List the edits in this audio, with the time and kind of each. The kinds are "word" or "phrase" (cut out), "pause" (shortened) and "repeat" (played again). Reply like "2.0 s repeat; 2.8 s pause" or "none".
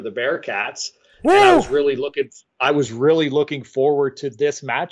none